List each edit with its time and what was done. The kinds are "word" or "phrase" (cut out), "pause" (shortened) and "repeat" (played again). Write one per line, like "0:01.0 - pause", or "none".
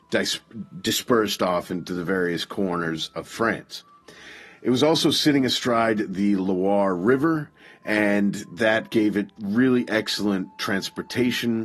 none

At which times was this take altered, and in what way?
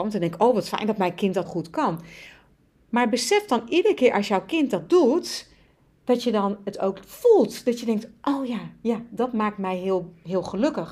0:01.4 - word

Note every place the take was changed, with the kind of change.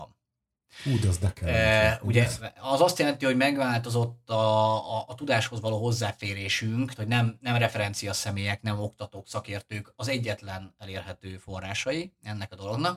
0:07.0 - word

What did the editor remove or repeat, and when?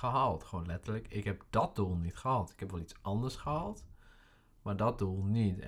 none

